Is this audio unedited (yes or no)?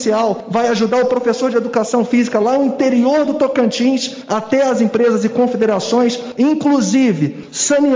yes